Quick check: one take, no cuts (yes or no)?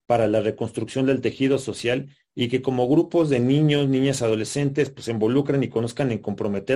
yes